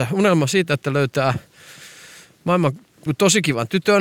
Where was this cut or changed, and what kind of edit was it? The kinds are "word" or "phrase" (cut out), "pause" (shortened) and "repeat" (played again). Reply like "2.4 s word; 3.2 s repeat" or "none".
3.1 s word